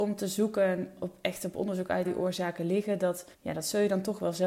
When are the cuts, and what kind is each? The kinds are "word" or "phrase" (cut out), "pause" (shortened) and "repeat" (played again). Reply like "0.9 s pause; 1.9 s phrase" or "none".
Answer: 1.0 s word; 2.0 s phrase; 3.3 s pause